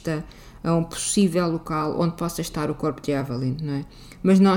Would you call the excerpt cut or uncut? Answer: uncut